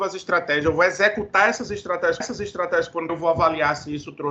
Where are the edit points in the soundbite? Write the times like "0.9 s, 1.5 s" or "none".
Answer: 2.2 s, 3.1 s